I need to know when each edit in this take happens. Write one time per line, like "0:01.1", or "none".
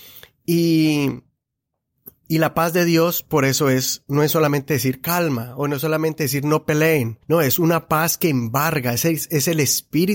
0:07.2